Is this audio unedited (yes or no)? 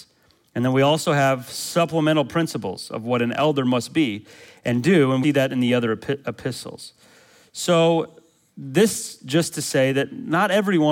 no